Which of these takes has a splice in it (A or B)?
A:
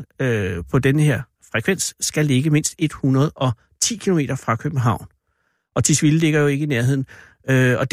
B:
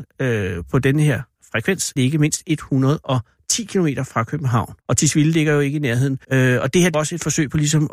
B